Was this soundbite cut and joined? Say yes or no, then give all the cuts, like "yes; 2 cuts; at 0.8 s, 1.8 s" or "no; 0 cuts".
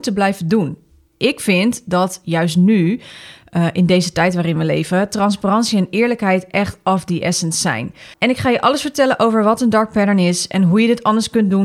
yes; 1 cut; at 8.1 s